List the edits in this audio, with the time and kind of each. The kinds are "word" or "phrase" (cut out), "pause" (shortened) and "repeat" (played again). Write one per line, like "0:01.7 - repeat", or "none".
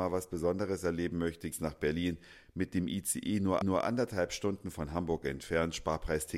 0:01.5 - word
0:03.6 - repeat

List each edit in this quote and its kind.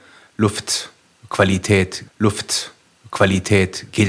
0:02.1 - repeat

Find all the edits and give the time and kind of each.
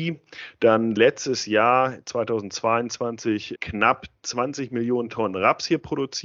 0:01.0 - phrase
0:03.6 - word

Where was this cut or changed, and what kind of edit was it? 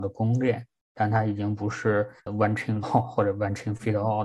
0:02.2 - pause
0:02.8 - phrase

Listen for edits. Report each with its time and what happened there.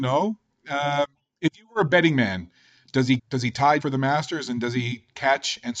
0:03.2 - word
0:03.8 - word

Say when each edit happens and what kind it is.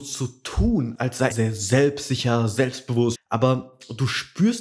0:01.3 - word
0:03.1 - word

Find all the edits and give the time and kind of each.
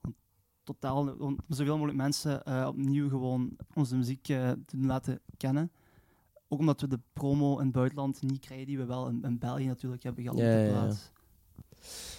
0:03.7 - word

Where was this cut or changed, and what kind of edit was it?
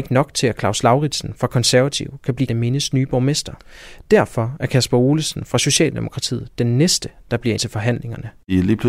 0:02.5 - word
0:07.6 - phrase

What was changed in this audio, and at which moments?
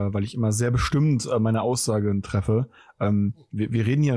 none

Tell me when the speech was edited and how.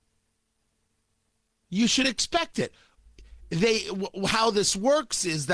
none

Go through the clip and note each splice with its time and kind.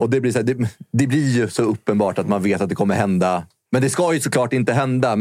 none

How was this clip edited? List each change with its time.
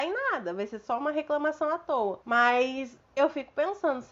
0:02.2 - pause

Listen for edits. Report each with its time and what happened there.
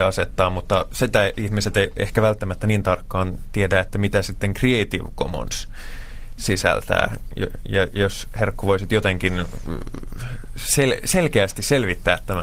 none

